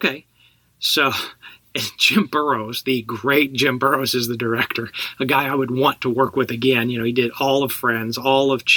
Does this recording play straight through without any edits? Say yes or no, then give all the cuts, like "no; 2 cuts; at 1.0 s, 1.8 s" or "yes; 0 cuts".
yes; 0 cuts